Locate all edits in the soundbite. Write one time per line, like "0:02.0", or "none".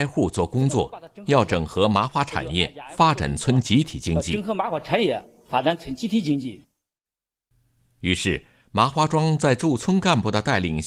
none